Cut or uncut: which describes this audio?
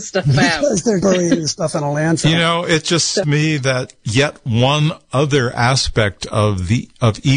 cut